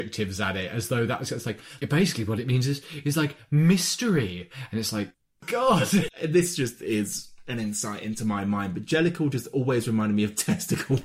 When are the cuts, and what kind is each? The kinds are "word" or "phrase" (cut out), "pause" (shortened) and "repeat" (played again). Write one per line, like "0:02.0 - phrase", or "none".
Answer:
none

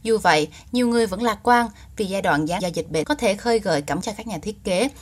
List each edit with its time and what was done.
0:02.6 - word
0:03.0 - word
0:04.0 - word

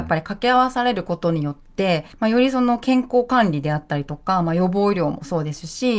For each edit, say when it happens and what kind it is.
0:02.1 - pause

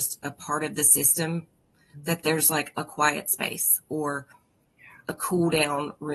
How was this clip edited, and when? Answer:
none

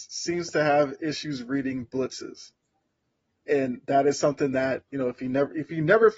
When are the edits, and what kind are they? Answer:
0:04.9 - pause

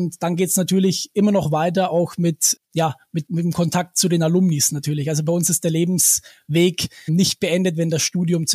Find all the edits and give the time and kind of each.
0:02.6 - word
0:03.3 - word
0:07.1 - word

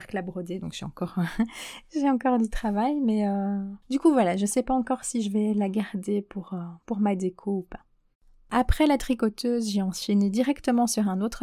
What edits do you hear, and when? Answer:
0:03.8 - pause
0:06.8 - pause
0:08.1 - pause

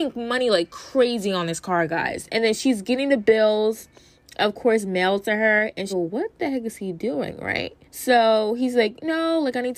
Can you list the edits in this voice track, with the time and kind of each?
0:05.9 - phrase
0:07.8 - pause

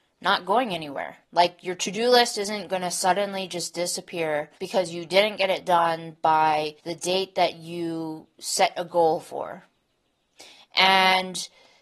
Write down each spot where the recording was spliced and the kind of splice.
0:01.2 - pause
0:04.6 - pause
0:06.8 - pause

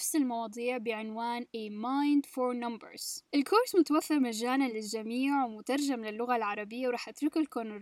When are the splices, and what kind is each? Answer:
none

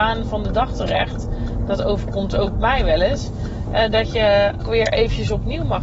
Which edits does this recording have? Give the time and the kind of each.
0:04.6 - word

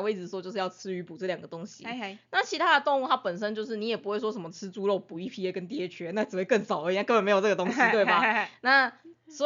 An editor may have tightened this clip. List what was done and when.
none

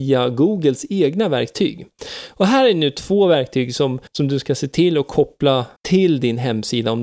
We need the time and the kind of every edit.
0:04.1 - pause
0:05.8 - pause

